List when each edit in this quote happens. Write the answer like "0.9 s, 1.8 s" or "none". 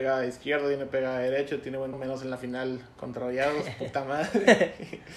1.9 s